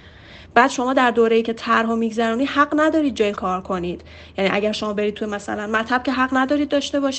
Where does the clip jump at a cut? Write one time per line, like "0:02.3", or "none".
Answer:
0:03.4